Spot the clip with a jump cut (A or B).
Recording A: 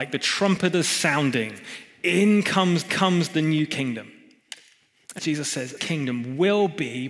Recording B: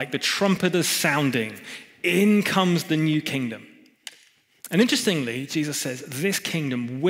A